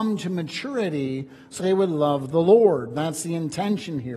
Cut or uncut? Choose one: cut